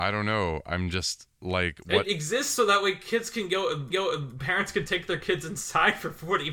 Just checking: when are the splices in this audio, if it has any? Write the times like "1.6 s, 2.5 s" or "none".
1.3 s, 3.9 s